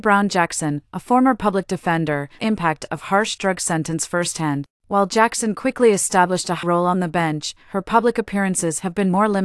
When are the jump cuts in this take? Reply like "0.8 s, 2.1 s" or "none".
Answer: 2.4 s, 4.8 s, 6.6 s